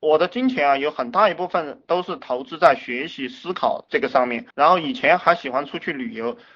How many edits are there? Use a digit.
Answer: 1